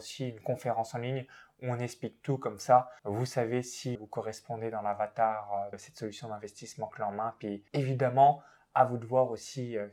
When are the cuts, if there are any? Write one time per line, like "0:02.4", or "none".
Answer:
0:03.0
0:03.9
0:05.7
0:07.7